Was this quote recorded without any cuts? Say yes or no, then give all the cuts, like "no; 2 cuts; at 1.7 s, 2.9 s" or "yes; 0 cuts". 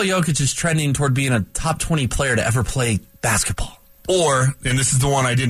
yes; 0 cuts